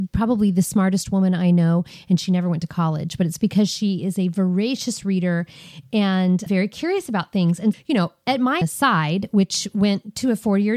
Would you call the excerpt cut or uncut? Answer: cut